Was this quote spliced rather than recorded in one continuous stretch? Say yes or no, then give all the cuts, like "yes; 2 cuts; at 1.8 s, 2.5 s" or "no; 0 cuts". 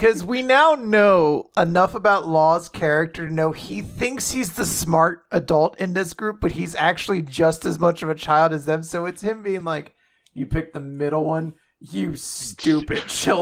no; 0 cuts